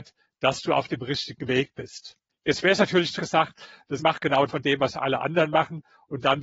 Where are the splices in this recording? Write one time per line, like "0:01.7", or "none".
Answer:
0:02.3
0:03.2
0:04.0
0:04.5